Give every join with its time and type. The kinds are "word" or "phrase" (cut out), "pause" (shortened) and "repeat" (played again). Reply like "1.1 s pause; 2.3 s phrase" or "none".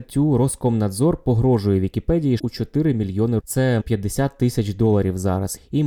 2.4 s word; 3.4 s word; 3.8 s word